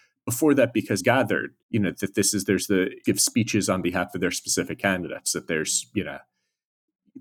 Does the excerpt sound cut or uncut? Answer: cut